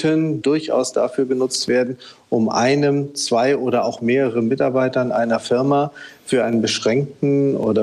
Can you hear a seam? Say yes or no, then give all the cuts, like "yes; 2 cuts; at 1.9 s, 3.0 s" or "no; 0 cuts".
no; 0 cuts